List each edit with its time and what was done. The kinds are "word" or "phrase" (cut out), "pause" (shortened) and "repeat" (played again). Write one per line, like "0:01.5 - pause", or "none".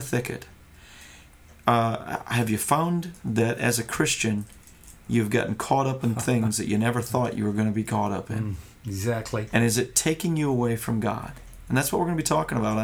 none